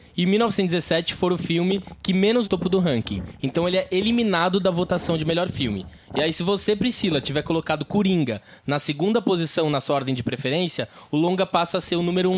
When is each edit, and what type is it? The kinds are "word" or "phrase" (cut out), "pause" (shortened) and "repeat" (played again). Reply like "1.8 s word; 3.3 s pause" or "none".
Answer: 2.4 s word